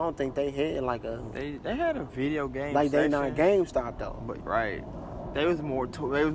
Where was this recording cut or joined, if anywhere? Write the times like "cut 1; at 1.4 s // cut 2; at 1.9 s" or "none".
cut 1; at 4.4 s